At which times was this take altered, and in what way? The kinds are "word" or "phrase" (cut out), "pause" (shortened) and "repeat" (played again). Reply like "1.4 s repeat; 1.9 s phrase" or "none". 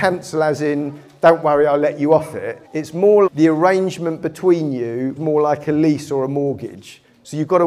2.6 s pause; 3.3 s word; 5.2 s word